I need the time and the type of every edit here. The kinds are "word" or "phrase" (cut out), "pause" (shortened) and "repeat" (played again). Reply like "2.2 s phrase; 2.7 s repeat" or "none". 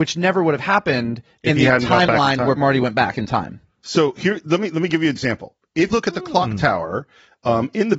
2.6 s word; 5.2 s word; 5.9 s word